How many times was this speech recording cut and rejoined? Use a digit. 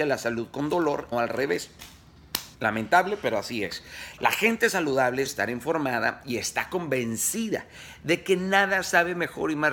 3